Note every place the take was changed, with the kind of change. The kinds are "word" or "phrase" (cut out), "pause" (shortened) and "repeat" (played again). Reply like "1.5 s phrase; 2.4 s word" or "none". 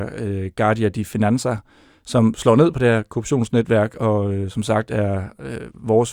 none